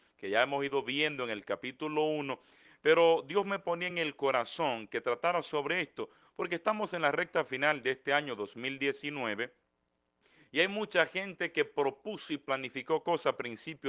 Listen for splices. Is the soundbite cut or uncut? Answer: uncut